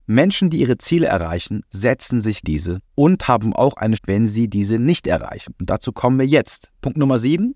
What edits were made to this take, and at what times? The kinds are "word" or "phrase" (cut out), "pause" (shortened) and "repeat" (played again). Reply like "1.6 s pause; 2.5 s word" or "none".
2.4 s phrase; 2.9 s pause; 4.0 s word